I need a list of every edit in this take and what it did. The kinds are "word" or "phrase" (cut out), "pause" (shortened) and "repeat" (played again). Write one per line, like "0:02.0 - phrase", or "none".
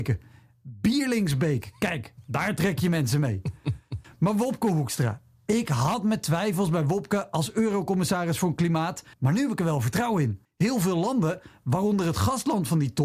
0:09.1 - pause
0:10.4 - pause